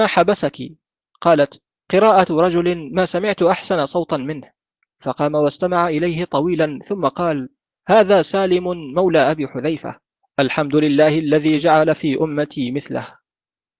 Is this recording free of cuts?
yes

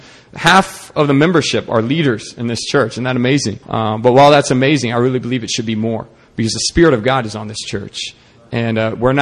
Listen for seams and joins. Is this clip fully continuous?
no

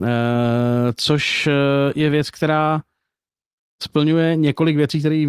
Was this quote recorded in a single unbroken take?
yes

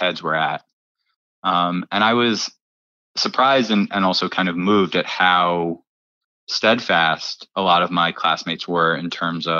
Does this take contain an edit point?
no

